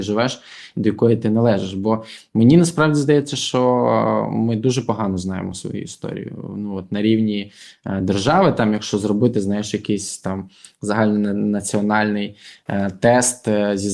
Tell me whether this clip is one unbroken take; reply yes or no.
yes